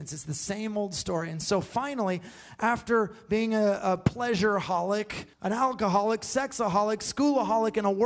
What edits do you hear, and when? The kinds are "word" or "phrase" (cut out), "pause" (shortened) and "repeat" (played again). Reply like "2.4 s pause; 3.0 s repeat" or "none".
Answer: 5.3 s pause